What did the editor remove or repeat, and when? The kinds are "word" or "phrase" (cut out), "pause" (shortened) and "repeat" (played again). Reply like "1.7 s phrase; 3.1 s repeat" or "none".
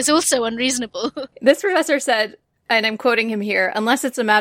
none